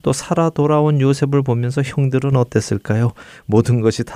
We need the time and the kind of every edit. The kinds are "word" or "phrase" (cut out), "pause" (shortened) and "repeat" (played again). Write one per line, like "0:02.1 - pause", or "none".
none